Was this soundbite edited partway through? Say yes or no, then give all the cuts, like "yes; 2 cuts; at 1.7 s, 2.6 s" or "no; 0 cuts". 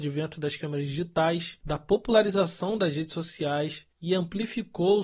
yes; 1 cut; at 3.9 s